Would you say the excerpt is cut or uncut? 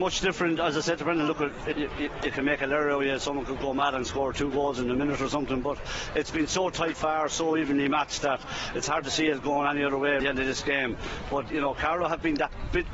cut